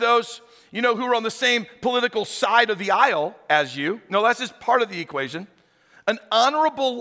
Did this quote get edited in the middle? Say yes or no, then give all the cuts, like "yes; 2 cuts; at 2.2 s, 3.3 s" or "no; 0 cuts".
no; 0 cuts